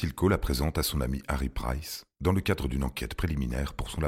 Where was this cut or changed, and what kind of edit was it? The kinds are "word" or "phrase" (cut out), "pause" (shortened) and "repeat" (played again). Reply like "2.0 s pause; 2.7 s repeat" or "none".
none